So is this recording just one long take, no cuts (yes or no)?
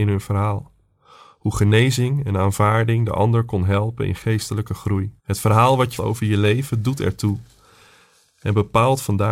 no